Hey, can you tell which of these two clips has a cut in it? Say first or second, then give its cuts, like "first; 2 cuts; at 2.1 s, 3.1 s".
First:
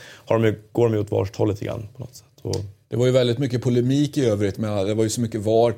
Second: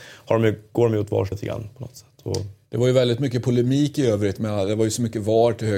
second; 1 cut; at 1.3 s